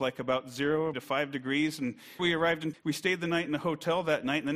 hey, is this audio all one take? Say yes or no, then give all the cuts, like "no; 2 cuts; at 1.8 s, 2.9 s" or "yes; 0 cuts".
no; 3 cuts; at 0.9 s, 2.2 s, 2.7 s